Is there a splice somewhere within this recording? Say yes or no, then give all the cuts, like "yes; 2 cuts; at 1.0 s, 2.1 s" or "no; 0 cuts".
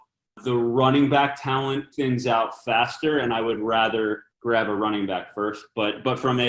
yes; 2 cuts; at 1.9 s, 4.3 s